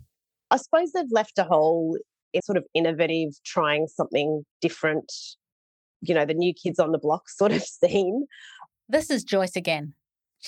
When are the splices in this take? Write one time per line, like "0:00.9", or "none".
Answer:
0:02.4
0:04.5